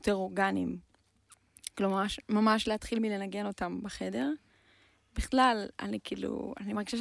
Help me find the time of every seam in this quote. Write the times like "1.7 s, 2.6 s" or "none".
none

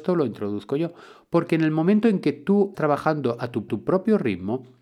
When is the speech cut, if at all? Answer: 2.7 s, 3.7 s

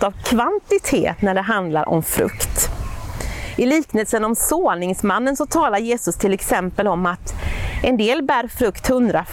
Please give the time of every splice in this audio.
none

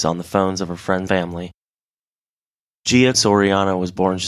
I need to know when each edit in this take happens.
1.1 s, 3.1 s

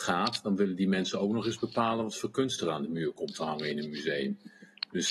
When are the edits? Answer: none

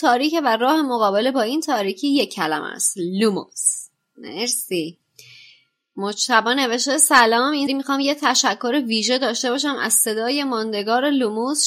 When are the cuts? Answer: 7.7 s

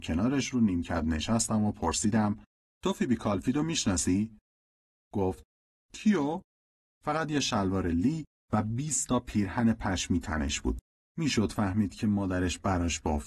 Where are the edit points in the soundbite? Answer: none

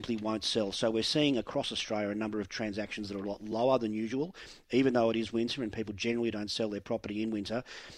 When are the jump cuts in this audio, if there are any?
none

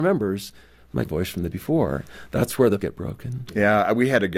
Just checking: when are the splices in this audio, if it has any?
1.0 s, 1.5 s, 2.8 s

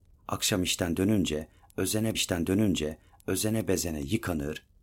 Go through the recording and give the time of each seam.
2.1 s

